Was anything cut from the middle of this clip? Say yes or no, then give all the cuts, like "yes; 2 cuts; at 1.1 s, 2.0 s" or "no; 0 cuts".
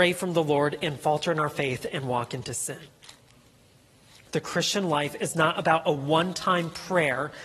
no; 0 cuts